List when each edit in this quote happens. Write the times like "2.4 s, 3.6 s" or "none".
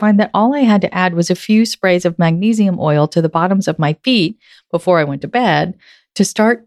none